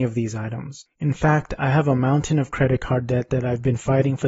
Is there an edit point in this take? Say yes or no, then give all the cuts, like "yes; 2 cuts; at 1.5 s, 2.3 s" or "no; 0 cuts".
yes; 1 cut; at 0.9 s